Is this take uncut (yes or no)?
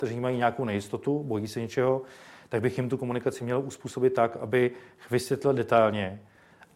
yes